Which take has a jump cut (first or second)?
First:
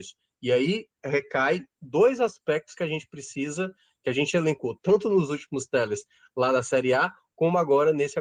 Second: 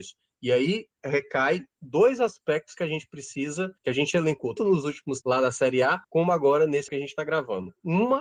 second